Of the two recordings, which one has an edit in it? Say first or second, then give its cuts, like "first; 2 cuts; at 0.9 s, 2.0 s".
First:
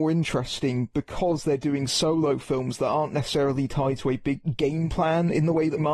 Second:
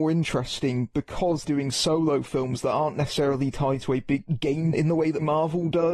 second; 2 cuts; at 1.4 s, 4.7 s